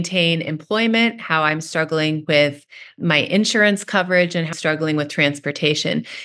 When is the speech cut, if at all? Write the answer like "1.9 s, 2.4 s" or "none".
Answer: 4.5 s

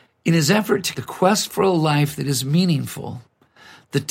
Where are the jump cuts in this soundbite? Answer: 0.9 s

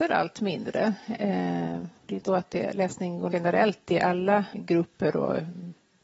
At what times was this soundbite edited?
2.0 s, 2.3 s, 3.3 s, 4.5 s

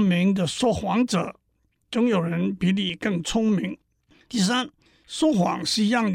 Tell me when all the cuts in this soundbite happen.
none

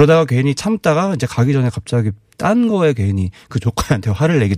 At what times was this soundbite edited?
none

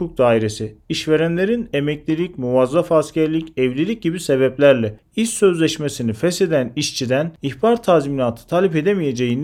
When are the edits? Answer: none

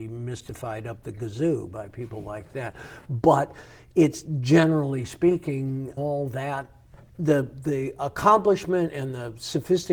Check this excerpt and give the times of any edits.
6.0 s, 7.1 s

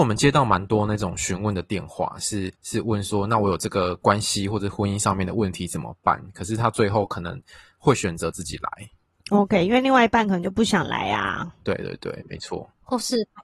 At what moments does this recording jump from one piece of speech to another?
2.5 s

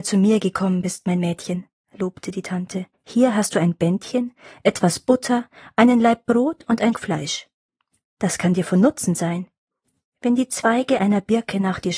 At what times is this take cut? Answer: 2.9 s, 6.9 s

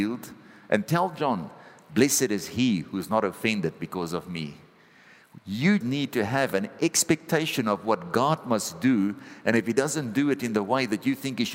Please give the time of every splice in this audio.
5.8 s

